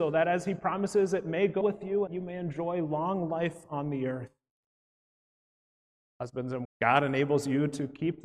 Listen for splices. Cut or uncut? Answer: cut